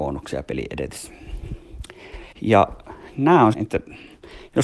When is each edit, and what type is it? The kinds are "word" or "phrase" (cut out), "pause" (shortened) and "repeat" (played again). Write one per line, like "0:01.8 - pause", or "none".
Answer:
0:02.3 - pause
0:03.5 - word

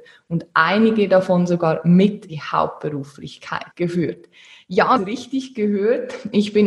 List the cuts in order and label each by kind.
0:02.3 - word
0:03.7 - pause
0:05.0 - phrase

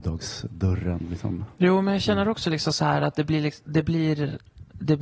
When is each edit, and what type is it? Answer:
none

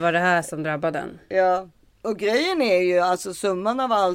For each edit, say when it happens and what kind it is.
none

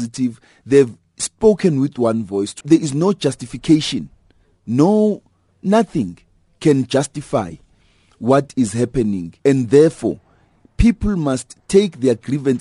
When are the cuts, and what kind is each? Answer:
0:02.6 - phrase
0:09.4 - pause

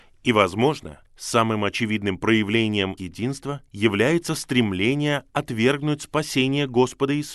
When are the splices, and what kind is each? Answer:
0:01.0 - pause
0:03.0 - word
0:03.7 - pause

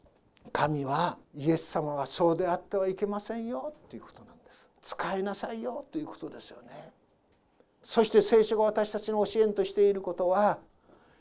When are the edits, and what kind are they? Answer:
0:01.2 - pause
0:04.7 - pause

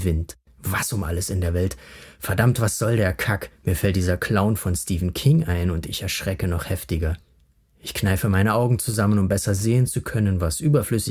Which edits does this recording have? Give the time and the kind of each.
none

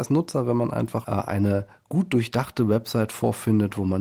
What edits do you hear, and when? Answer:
0:01.0 - phrase

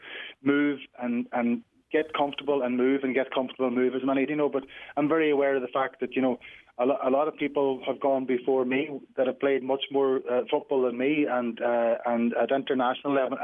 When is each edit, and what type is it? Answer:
0:04.3 - phrase

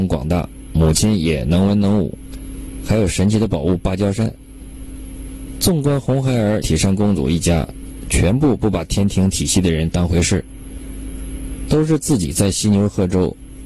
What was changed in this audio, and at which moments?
0:06.6 - phrase

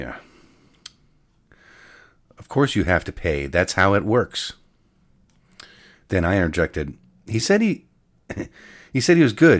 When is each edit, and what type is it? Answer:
none

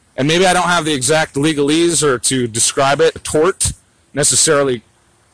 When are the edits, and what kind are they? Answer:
0:03.2 - word

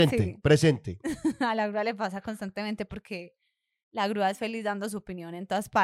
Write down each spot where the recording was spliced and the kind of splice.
none

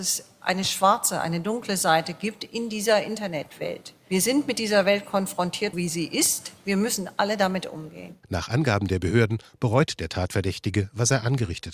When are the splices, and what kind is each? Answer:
0:05.7 - word

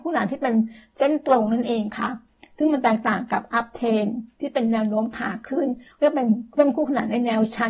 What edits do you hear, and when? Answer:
none

